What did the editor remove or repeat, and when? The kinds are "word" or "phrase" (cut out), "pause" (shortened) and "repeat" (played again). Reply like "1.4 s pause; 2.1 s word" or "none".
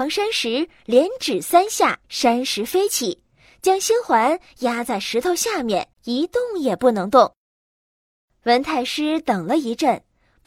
2.0 s pause; 5.9 s pause